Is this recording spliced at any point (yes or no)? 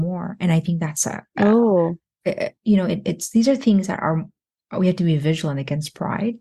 no